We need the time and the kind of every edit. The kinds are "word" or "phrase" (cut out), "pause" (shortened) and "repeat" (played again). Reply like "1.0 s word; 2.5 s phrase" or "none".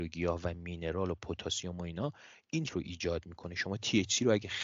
2.7 s word